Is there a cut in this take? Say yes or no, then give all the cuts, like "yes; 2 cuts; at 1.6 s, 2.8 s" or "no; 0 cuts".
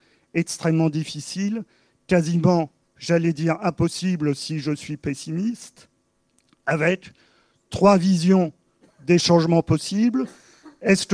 no; 0 cuts